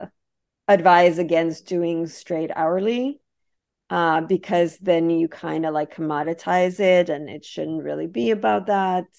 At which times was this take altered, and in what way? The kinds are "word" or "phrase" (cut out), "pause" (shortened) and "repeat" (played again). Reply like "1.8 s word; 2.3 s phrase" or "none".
none

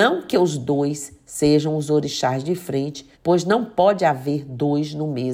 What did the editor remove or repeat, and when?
3.1 s pause

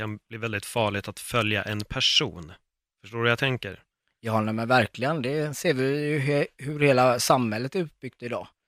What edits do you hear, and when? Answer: none

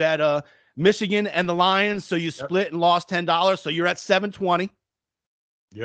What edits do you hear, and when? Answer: none

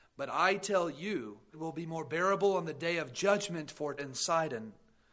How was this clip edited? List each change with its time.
1.5 s word; 4.0 s word

